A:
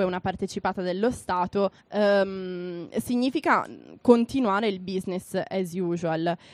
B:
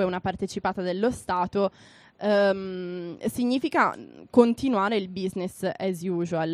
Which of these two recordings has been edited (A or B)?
A